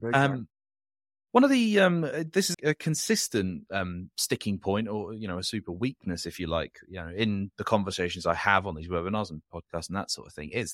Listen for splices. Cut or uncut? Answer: cut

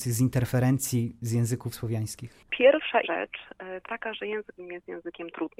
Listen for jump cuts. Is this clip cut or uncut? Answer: cut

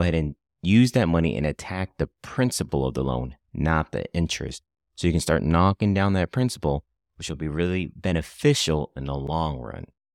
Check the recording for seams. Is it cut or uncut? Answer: uncut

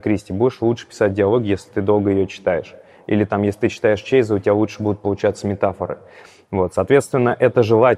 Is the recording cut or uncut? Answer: uncut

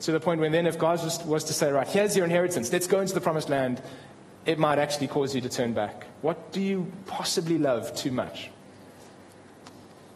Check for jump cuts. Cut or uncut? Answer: uncut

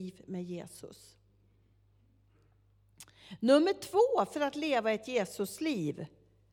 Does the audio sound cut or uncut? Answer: uncut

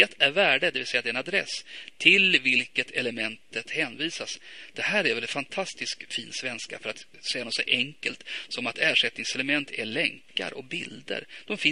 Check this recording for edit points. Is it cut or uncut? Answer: uncut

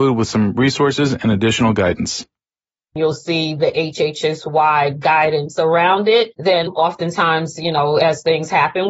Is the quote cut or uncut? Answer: uncut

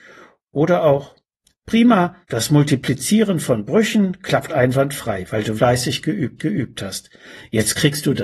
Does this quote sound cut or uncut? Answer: cut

